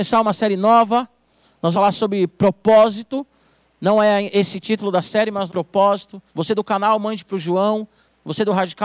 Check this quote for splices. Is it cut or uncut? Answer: cut